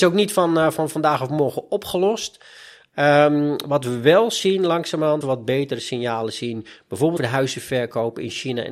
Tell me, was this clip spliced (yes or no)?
yes